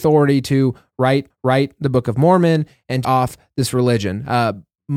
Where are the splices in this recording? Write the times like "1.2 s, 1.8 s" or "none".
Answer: 1.3 s, 3.0 s